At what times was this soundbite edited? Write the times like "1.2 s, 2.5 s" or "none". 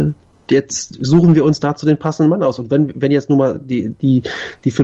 none